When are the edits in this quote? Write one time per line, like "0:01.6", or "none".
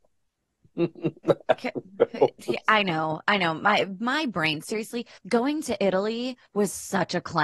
0:05.2
0:06.5